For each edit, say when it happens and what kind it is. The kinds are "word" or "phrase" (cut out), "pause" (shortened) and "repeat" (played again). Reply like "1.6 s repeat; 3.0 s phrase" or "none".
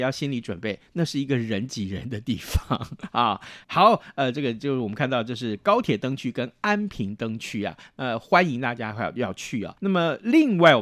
9.8 s pause